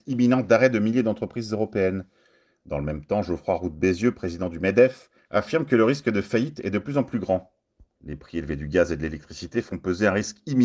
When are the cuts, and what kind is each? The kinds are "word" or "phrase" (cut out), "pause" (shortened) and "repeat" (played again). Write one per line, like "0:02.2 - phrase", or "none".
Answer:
none

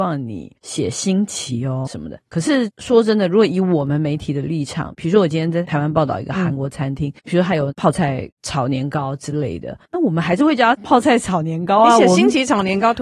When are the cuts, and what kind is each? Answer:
0:01.9 - word
0:02.2 - pause
0:07.2 - pause
0:09.8 - pause

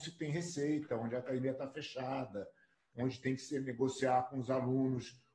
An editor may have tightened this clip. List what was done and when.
none

